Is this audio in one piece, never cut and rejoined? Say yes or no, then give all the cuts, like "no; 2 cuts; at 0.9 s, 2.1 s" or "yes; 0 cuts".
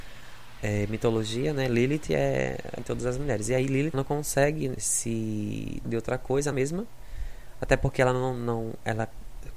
no; 5 cuts; at 2.8 s, 3.9 s, 4.8 s, 5.8 s, 6.5 s